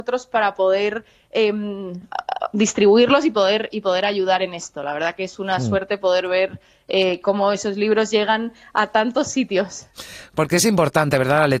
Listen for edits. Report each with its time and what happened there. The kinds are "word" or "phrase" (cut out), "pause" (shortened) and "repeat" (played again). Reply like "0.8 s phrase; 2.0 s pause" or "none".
none